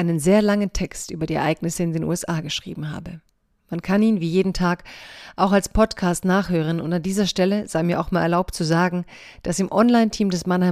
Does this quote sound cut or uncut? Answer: uncut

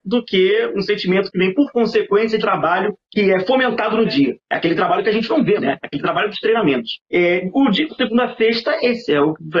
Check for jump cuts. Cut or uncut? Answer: cut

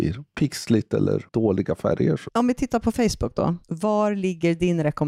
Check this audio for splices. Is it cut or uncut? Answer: uncut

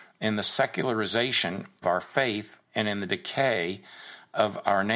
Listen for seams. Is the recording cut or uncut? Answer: cut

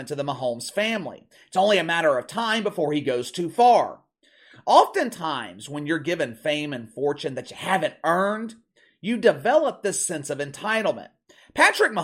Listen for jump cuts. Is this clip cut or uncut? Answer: uncut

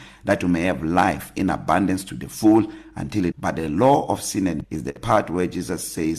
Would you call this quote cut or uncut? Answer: cut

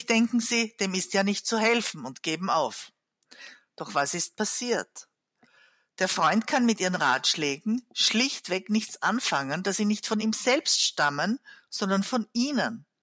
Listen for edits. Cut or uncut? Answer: uncut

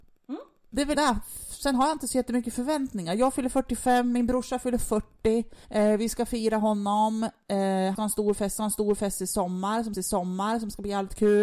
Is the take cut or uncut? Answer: cut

